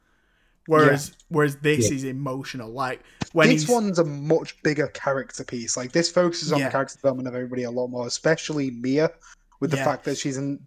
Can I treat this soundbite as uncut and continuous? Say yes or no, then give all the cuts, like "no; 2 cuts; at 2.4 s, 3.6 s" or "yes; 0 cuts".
yes; 0 cuts